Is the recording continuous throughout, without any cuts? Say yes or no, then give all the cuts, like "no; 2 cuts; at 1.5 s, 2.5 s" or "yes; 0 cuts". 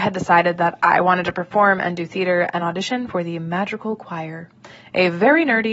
yes; 0 cuts